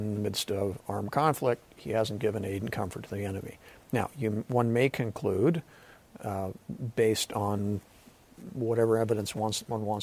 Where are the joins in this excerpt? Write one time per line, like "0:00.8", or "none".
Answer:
none